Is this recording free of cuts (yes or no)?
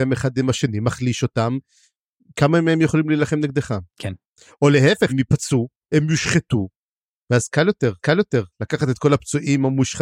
no